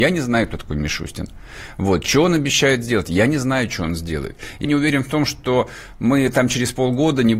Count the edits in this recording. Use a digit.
1